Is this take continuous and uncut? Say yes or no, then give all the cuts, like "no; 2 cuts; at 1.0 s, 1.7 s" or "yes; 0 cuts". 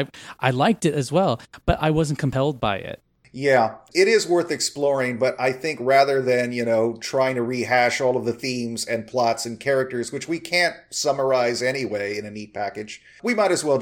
yes; 0 cuts